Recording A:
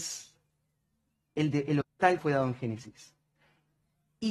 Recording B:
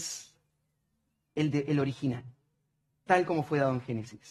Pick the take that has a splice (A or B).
A